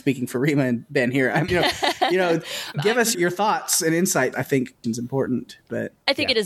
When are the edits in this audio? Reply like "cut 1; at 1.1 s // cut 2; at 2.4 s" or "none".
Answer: cut 1; at 1.5 s // cut 2; at 2.7 s // cut 3; at 3.1 s // cut 4; at 4.3 s // cut 5; at 4.8 s